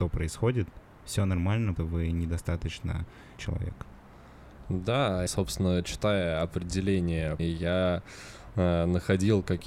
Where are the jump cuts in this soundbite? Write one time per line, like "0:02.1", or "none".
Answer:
0:01.8
0:03.4
0:05.3
0:07.4